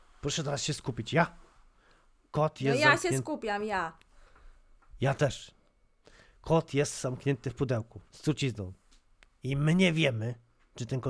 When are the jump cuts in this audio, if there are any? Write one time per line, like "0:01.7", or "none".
0:08.1